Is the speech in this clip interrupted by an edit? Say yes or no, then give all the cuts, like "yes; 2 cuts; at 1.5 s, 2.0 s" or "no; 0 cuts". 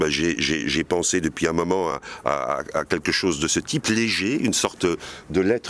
no; 0 cuts